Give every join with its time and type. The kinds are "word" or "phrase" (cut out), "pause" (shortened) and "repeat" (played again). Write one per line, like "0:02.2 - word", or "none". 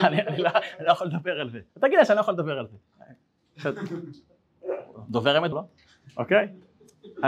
0:01.7 - pause
0:05.5 - word

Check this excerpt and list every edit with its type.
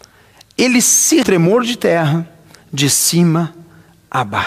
0:01.2 - phrase

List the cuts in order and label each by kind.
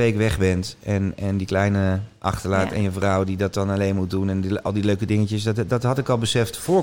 none

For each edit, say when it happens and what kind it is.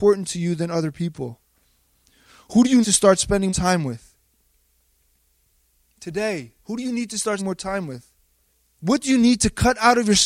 0:02.8 - word
0:03.5 - word
0:07.4 - word
0:08.5 - pause

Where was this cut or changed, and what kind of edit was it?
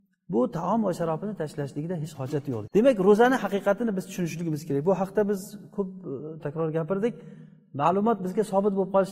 0:02.1 - word
0:02.7 - word
0:06.4 - word

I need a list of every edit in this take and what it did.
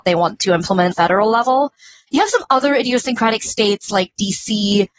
0:00.9 - phrase

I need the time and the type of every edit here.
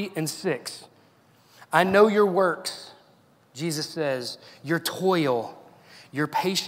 none

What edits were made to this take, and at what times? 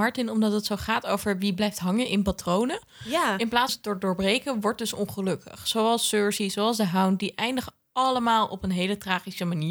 0:03.7 - word

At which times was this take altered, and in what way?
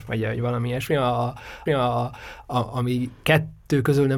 0:01.7 - repeat

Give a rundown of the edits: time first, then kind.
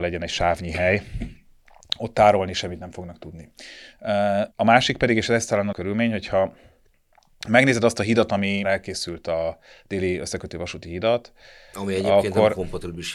0:04.5 - pause
0:05.7 - word
0:08.6 - word

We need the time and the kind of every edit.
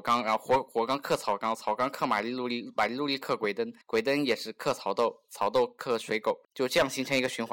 0:03.8 - pause
0:06.4 - pause

